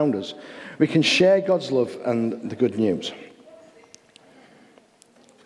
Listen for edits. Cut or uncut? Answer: uncut